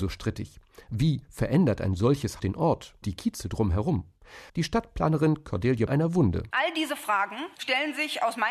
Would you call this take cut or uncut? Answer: cut